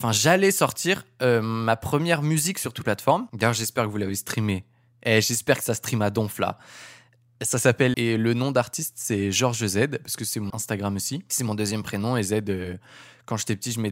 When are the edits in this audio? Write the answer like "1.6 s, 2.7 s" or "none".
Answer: 2.8 s, 7.9 s, 10.5 s